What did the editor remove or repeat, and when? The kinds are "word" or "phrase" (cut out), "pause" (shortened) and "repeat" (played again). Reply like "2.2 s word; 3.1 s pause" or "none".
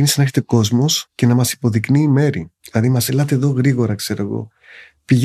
1.1 s pause; 2.6 s pause; 3.1 s word